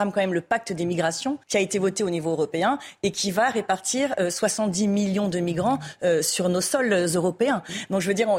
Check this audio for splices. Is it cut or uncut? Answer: cut